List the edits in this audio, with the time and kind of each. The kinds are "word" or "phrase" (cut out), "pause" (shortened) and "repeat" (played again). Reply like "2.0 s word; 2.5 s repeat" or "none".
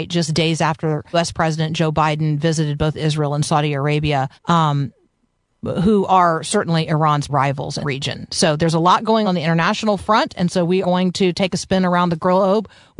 1.1 s word; 4.4 s pause; 7.3 s word; 7.8 s word; 9.2 s word; 10.8 s word